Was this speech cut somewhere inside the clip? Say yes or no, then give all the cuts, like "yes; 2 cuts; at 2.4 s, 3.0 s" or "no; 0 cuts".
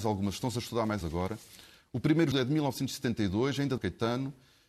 yes; 3 cuts; at 1.0 s, 2.3 s, 3.8 s